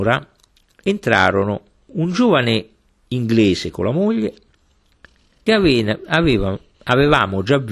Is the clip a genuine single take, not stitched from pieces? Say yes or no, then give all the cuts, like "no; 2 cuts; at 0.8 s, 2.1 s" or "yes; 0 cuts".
yes; 0 cuts